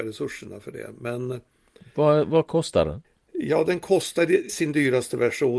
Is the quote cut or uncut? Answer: cut